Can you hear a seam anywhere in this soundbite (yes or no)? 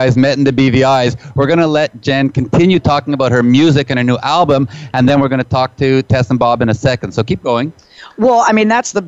no